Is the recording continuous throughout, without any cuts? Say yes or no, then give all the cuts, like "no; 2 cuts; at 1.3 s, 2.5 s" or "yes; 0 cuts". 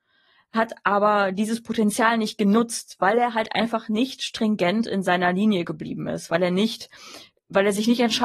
yes; 0 cuts